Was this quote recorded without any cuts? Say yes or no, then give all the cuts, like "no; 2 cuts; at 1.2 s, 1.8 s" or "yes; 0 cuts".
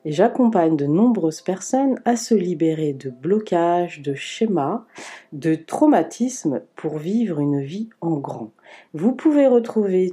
yes; 0 cuts